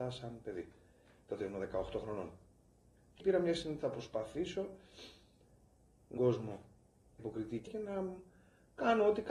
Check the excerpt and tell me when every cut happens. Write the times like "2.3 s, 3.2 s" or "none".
3.2 s, 3.8 s, 6.2 s, 7.2 s, 7.7 s